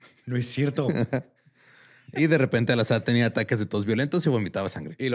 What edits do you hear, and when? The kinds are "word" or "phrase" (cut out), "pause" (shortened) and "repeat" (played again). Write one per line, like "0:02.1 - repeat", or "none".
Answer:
none